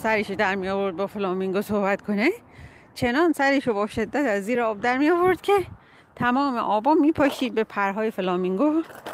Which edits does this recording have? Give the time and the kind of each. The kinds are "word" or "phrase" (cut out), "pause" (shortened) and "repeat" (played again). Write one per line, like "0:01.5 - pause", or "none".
none